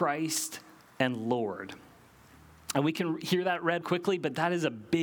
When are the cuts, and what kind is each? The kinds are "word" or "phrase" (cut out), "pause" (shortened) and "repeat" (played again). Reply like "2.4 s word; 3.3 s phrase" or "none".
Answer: 3.8 s word